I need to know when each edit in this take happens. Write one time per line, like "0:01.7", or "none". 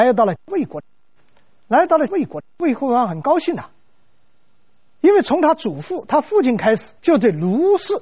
0:07.0